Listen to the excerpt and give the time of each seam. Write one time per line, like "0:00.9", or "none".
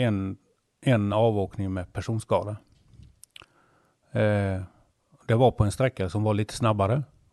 none